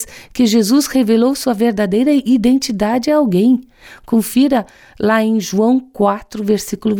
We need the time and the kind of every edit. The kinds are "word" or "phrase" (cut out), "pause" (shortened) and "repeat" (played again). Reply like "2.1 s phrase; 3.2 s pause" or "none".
none